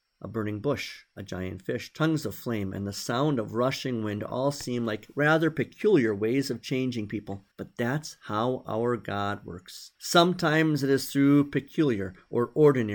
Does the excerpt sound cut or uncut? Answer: cut